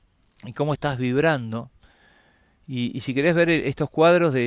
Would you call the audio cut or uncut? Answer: uncut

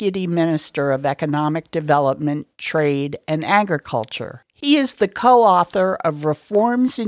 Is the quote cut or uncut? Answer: uncut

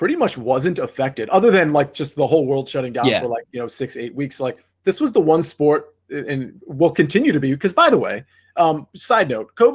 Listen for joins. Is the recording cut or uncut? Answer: uncut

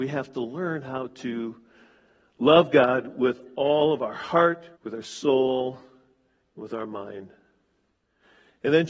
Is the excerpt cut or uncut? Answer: cut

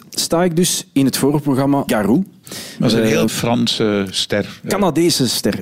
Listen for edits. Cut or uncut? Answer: cut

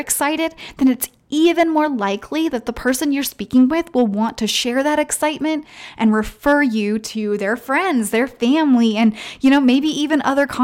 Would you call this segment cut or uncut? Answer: uncut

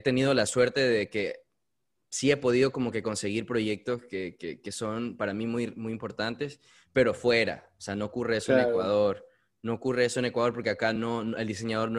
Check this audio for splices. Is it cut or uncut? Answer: uncut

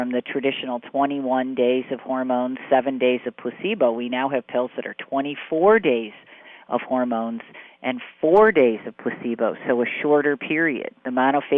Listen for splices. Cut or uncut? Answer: uncut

